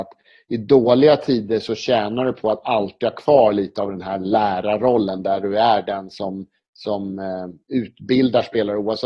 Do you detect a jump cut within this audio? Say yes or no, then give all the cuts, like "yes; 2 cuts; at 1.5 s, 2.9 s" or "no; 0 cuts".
no; 0 cuts